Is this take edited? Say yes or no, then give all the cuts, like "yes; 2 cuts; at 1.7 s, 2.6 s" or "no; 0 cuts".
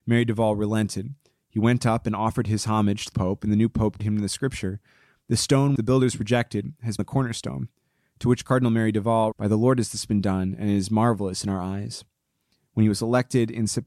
yes; 5 cuts; at 3.1 s, 4.0 s, 5.8 s, 7.0 s, 9.3 s